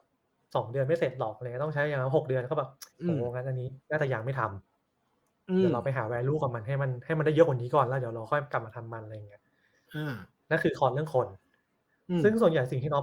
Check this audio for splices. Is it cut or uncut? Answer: cut